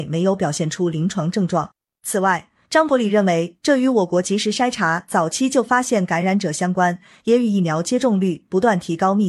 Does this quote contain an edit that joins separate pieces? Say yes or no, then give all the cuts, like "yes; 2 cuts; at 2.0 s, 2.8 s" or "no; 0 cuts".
no; 0 cuts